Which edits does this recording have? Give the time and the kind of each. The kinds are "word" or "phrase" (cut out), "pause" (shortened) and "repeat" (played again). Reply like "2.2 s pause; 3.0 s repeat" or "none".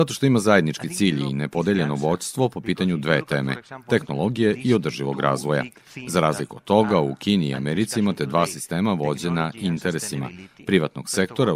none